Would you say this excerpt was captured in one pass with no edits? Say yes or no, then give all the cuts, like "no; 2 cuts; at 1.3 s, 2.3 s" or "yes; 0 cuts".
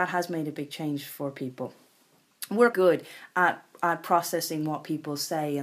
no; 1 cut; at 2.7 s